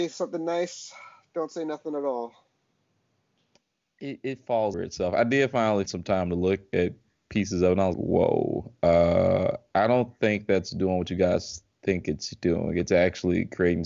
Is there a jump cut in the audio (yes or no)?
yes